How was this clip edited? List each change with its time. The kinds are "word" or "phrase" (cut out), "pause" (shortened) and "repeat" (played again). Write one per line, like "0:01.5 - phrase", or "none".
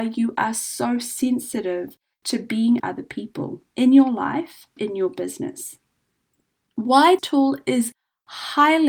0:02.8 - word
0:03.7 - pause
0:04.8 - word
0:07.2 - word